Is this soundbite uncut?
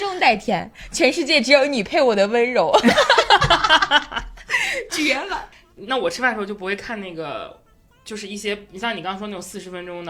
yes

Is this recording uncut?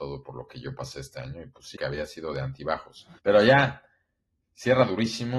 no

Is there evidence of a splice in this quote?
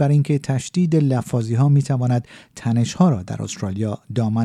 no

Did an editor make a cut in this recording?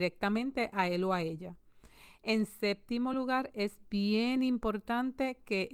no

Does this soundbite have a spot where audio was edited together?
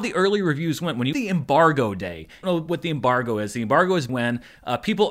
yes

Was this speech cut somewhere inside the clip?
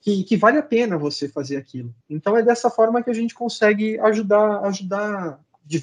yes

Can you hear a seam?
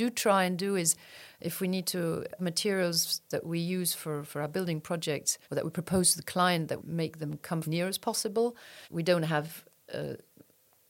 yes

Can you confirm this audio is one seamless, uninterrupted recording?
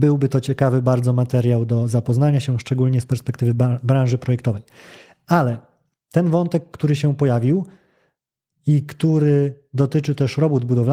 yes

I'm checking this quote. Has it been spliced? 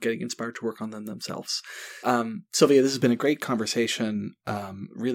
yes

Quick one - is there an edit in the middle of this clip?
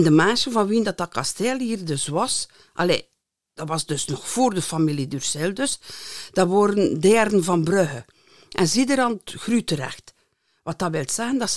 no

